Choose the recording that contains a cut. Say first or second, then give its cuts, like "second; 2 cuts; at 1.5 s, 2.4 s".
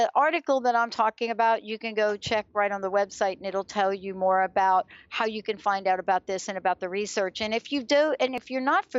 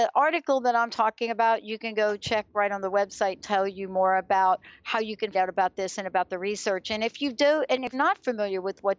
second; 3 cuts; at 3.4 s, 5.3 s, 7.9 s